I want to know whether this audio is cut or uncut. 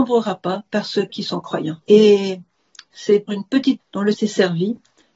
cut